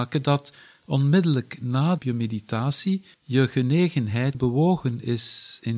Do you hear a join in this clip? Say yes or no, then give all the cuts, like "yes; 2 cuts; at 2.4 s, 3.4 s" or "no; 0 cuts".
yes; 3 cuts; at 2.0 s, 3.1 s, 4.3 s